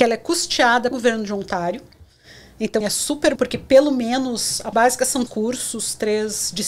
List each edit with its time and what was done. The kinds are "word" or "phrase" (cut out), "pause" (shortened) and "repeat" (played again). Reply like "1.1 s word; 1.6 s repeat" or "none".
0.9 s word; 2.8 s word; 3.4 s word; 4.7 s word; 5.3 s word

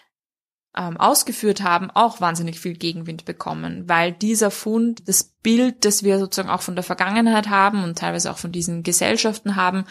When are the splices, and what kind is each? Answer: none

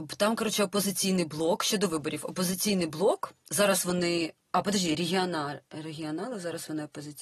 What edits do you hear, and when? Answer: none

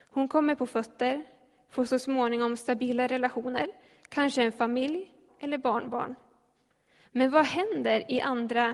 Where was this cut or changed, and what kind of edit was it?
5.3 s word

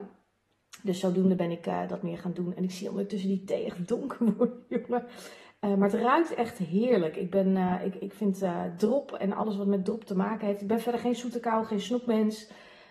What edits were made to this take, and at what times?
none

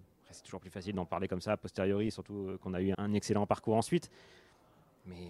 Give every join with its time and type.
2.9 s word

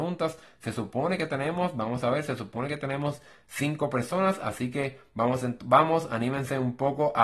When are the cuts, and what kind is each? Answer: none

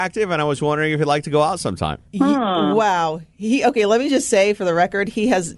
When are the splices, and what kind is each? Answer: 2.1 s pause

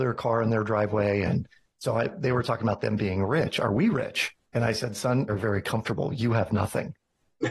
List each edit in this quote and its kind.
4.4 s pause; 5.3 s phrase

